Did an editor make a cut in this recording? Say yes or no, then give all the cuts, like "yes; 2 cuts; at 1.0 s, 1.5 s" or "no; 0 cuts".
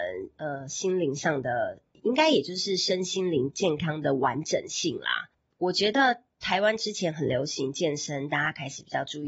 no; 0 cuts